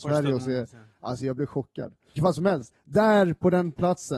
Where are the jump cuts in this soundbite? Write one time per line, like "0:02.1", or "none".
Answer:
0:02.2